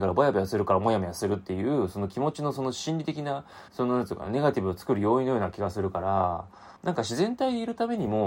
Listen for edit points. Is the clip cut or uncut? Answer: cut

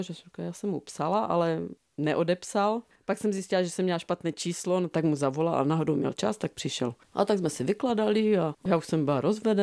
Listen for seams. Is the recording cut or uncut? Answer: uncut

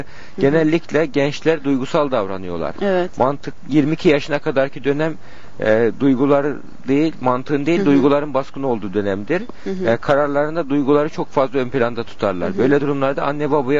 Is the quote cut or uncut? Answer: uncut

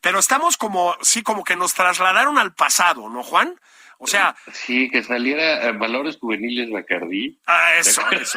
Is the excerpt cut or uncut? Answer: uncut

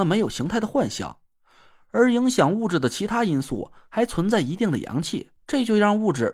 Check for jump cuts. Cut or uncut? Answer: cut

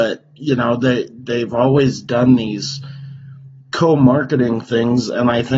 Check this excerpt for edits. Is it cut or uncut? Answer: uncut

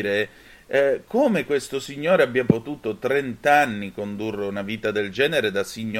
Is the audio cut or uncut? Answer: uncut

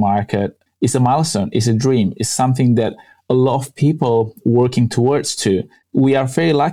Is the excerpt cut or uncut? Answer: uncut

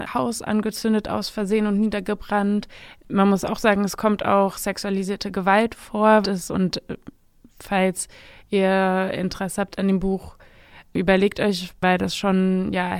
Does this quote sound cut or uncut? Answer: cut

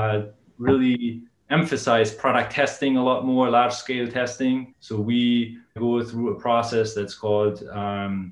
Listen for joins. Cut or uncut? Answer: cut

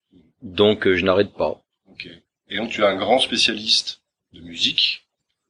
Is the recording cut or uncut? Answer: uncut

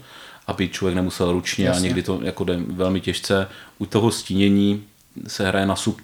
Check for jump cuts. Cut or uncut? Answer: uncut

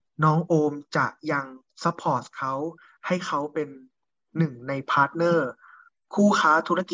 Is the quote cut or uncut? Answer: uncut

